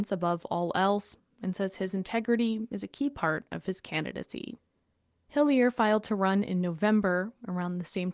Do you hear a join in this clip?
no; 0 cuts

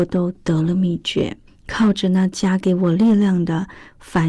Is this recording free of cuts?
no; 1 cut; at 1.5 s

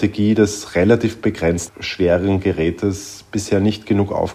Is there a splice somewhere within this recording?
yes; 1 cut; at 1.7 s

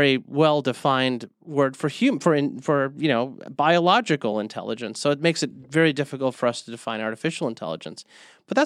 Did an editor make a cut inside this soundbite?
no; 0 cuts

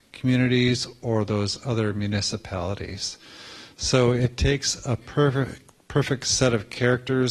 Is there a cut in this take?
no; 0 cuts

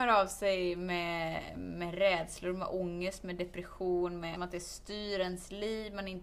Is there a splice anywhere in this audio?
yes; 1 cut; at 4.3 s

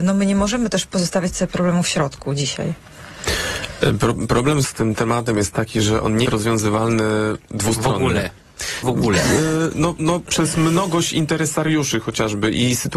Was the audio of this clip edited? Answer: yes; 4 cuts; at 4.6 s, 6.3 s, 8.8 s, 10.2 s

